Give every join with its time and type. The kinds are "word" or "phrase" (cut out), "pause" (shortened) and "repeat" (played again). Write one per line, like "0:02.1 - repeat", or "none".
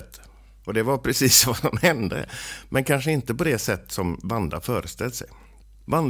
none